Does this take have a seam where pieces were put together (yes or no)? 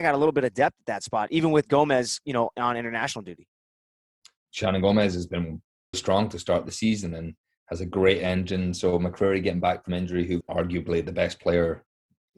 yes